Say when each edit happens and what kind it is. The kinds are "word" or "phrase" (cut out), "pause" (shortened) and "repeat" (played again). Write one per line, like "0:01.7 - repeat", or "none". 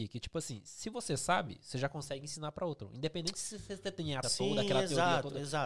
0:04.2 - word